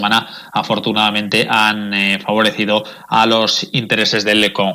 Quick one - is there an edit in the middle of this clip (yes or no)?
no